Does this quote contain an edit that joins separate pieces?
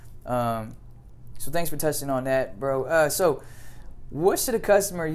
no; 0 cuts

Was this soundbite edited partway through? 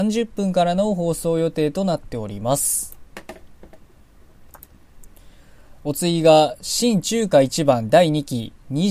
no; 0 cuts

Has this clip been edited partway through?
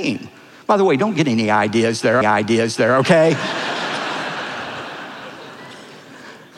yes; 1 cut; at 2.2 s

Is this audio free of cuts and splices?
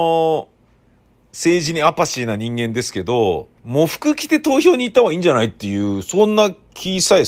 no; 1 cut; at 3.6 s

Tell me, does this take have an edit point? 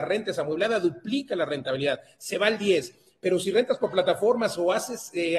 no; 0 cuts

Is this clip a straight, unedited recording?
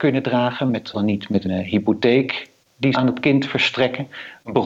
no; 3 cuts; at 0.9 s, 1.4 s, 2.9 s

